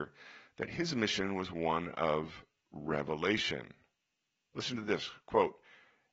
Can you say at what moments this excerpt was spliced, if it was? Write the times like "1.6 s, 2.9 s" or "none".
none